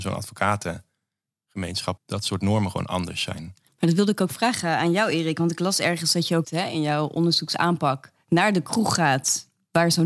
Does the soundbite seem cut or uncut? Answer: cut